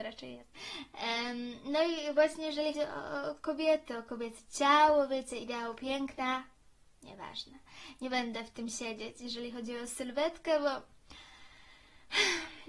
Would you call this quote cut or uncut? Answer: cut